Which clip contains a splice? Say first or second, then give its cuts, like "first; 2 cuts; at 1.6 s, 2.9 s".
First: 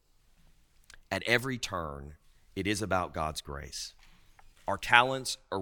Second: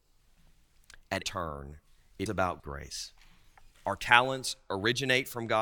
second; 3 cuts; at 1.2 s, 2.3 s, 2.6 s